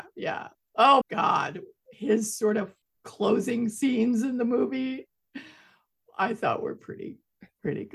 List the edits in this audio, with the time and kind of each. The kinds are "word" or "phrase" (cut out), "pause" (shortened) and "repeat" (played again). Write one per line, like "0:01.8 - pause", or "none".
0:01.0 - word
0:02.8 - pause

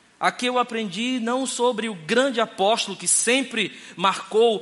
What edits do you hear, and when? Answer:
none

